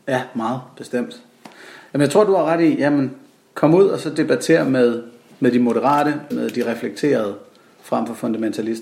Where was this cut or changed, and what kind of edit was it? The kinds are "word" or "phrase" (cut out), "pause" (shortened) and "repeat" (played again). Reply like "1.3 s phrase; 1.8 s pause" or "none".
6.3 s word